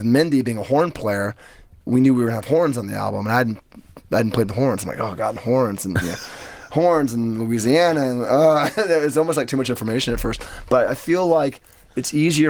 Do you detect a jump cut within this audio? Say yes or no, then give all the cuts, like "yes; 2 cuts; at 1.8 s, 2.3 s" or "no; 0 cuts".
no; 0 cuts